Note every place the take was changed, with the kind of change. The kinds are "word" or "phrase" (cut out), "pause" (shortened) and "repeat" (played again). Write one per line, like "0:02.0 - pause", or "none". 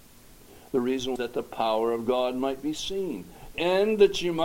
0:01.2 - word
0:03.5 - phrase